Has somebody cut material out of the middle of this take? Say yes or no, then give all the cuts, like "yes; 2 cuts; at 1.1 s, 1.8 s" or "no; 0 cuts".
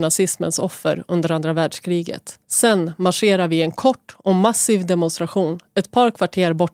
yes; 1 cut; at 2.4 s